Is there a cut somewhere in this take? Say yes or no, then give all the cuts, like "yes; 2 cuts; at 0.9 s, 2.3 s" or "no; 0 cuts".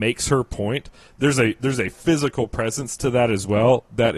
no; 0 cuts